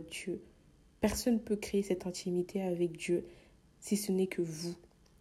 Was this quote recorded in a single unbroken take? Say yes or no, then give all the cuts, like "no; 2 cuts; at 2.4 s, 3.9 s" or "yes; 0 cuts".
yes; 0 cuts